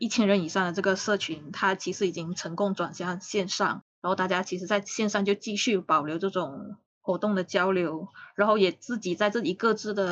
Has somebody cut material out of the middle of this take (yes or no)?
yes